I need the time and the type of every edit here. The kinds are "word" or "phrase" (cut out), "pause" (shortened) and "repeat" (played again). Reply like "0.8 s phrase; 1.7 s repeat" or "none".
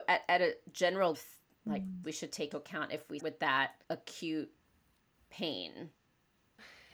1.1 s phrase; 2.0 s word; 2.5 s word; 3.2 s word; 3.8 s pause